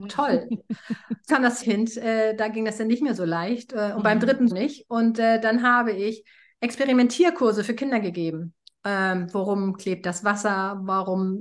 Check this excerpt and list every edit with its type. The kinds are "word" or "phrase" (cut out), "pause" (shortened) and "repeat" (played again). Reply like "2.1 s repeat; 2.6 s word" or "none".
1.3 s word; 1.6 s word; 4.5 s word

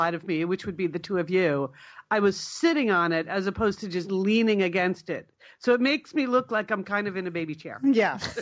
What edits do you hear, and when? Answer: none

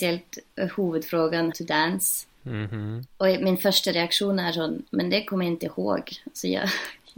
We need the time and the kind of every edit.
1.5 s phrase; 2.3 s pause; 3.1 s pause; 4.9 s pause

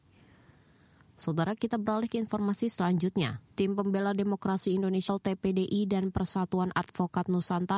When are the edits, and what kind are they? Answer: 3.5 s pause; 5.1 s word

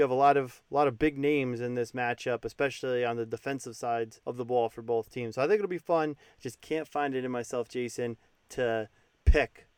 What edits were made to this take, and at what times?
4.2 s pause

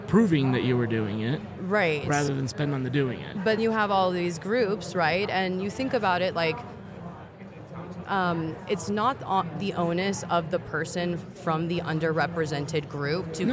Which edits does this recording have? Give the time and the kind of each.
3.6 s word; 8.0 s phrase

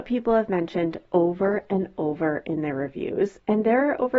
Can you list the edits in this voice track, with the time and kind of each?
none

